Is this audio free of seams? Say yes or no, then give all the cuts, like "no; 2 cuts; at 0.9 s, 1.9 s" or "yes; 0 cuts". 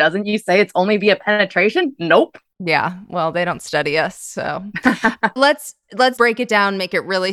no; 2 cuts; at 5.4 s, 6.2 s